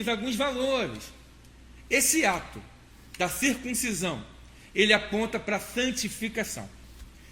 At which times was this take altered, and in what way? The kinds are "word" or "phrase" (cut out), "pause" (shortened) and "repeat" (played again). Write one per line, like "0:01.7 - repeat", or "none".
none